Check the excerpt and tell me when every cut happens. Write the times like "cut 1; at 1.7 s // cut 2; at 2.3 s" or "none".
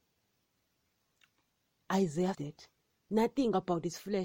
cut 1; at 2.3 s